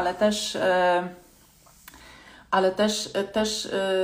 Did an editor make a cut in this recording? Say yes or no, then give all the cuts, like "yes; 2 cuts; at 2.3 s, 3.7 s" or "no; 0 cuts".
no; 0 cuts